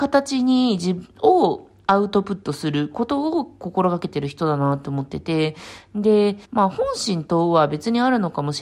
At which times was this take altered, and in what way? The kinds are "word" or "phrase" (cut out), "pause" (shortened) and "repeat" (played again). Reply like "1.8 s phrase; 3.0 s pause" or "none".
6.4 s pause